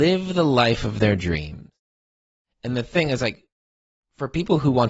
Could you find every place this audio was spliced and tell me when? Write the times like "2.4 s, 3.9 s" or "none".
none